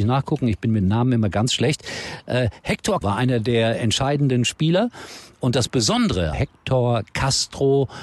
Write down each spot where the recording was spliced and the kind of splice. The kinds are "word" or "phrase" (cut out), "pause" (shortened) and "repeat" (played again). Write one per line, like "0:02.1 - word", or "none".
0:03.0 - word
0:06.3 - word

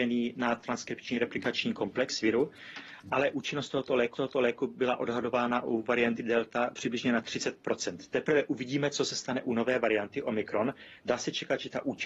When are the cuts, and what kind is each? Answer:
0:04.1 - repeat

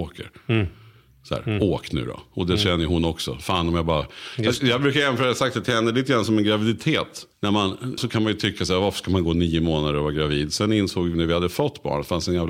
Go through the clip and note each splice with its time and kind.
0:07.3 - pause
0:08.0 - word
0:11.1 - word

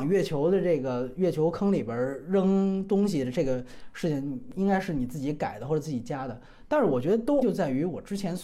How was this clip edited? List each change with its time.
0:07.4 - word

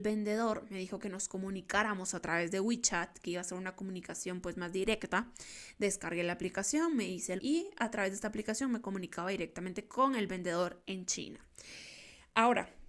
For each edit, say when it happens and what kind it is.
0:07.4 - word

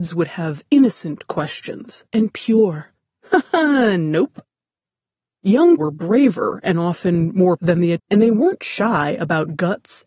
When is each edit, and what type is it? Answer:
0:02.1 - word
0:05.8 - word
0:07.6 - word
0:08.0 - word

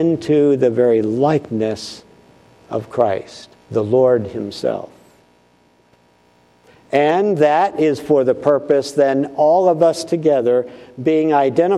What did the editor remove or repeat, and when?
0:03.5 - pause

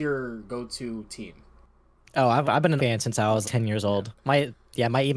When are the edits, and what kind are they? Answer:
0:02.4 - word
0:02.8 - word
0:03.4 - word

